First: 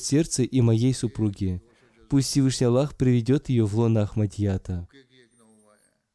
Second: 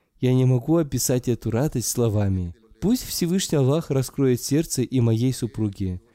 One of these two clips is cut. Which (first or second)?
second